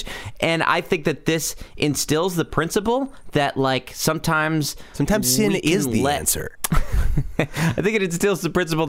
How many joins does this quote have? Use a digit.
0